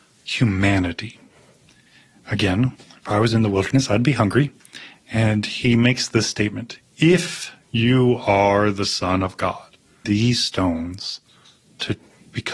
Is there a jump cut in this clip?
yes; 2 cuts; at 2.7 s, 10.0 s

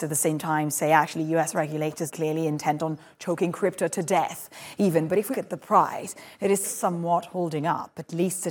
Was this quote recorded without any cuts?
no; 3 cuts; at 2.1 s, 5.3 s, 6.6 s

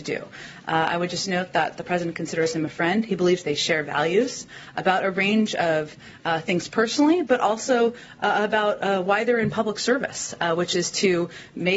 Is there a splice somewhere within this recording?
no; 0 cuts

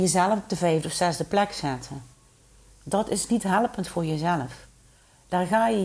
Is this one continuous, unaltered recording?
yes; 0 cuts

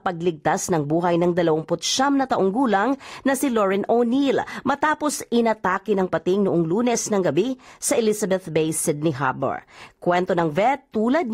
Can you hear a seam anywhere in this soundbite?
no; 0 cuts

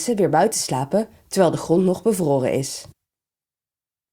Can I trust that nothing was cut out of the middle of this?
yes; 0 cuts

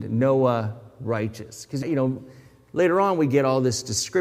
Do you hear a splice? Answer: yes; 1 cut; at 1.8 s

